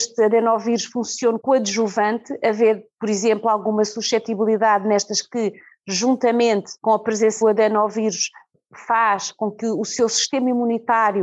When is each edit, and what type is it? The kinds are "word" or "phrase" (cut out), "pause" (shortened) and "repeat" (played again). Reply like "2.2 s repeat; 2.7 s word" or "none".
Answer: 1.4 s phrase; 5.2 s word; 6.8 s pause; 7.4 s word